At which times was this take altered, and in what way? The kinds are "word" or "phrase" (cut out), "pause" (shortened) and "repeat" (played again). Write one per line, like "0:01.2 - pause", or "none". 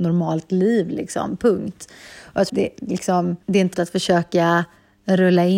0:02.5 - phrase
0:03.4 - pause
0:03.7 - word